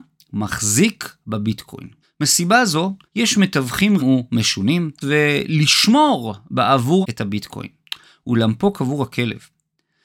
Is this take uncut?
no; 5 cuts; at 2.0 s, 3.1 s, 4.0 s, 5.0 s, 7.0 s

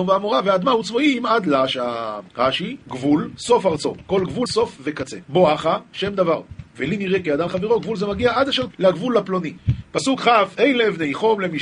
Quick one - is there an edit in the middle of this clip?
yes; 3 cuts; at 4.5 s, 7.5 s, 8.7 s

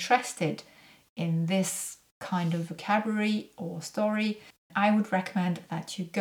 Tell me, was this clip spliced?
yes; 1 cut; at 4.7 s

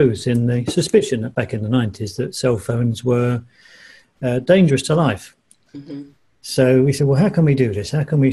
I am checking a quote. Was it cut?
no; 0 cuts

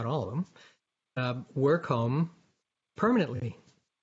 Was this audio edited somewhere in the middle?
no; 0 cuts

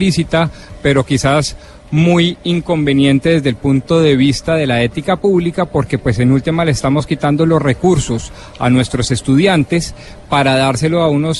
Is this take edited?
no; 0 cuts

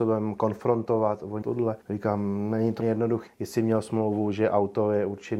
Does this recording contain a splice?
yes; 4 cuts; at 1.4 s, 1.8 s, 2.8 s, 3.3 s

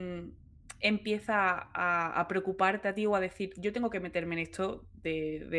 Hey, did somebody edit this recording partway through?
no; 0 cuts

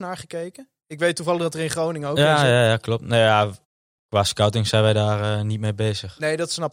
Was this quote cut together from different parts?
no; 0 cuts

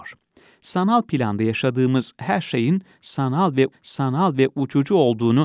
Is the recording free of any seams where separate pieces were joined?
no; 1 cut; at 3.7 s

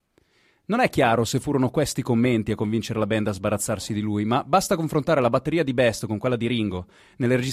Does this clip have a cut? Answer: no; 0 cuts

